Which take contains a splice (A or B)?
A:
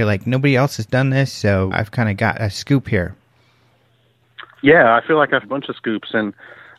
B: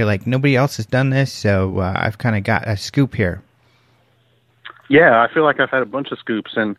A